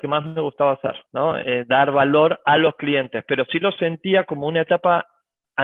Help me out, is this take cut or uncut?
cut